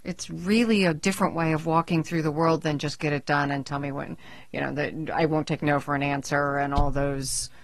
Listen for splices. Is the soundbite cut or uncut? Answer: uncut